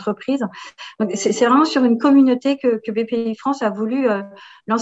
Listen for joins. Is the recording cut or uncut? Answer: uncut